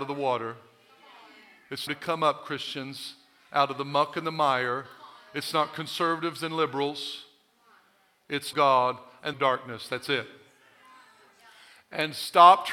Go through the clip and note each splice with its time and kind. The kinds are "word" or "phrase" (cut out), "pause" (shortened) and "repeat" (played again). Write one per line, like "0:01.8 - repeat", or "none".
0:01.9 - word
0:08.5 - phrase
0:09.3 - phrase